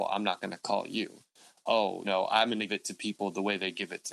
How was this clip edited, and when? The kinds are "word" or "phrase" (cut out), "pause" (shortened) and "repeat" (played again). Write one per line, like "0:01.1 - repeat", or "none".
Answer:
0:02.0 - word
0:02.7 - word